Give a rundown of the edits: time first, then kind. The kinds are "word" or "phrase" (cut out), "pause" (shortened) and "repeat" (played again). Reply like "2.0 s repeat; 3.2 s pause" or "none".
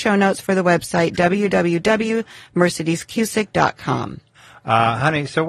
none